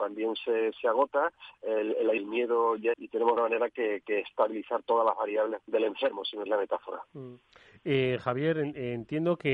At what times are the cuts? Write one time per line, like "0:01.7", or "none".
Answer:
0:02.2
0:02.9
0:03.4
0:04.0
0:05.6
0:06.5